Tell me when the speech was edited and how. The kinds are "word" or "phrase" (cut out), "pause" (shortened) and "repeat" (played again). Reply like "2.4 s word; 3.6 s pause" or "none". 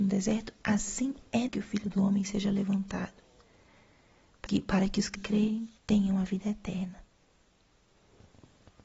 1.5 s word; 4.5 s word; 5.1 s word; 5.8 s pause